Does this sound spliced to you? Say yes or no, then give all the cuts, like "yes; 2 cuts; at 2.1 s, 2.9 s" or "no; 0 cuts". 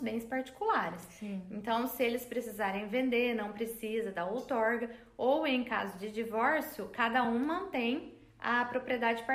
no; 0 cuts